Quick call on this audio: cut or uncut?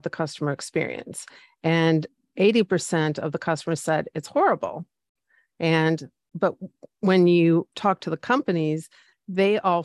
uncut